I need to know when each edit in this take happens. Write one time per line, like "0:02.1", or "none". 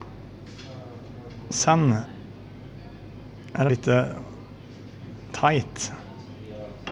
0:03.7